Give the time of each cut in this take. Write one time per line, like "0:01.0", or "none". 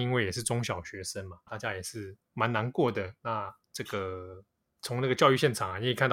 0:01.5
0:03.6